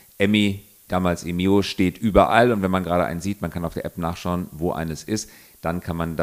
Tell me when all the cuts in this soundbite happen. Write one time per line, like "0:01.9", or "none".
none